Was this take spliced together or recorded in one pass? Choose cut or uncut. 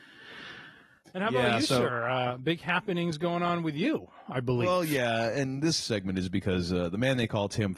cut